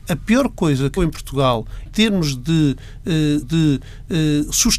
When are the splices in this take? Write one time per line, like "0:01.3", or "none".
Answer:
0:01.0
0:01.9
0:03.4